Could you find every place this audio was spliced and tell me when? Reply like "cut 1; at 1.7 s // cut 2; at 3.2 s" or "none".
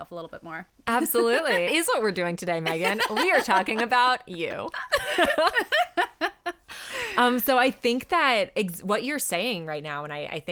cut 1; at 1.7 s